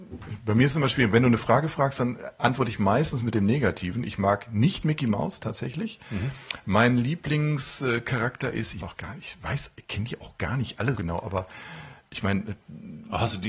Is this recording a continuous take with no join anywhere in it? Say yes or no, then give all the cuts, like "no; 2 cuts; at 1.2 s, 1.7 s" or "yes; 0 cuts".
no; 2 cuts; at 8.8 s, 11.0 s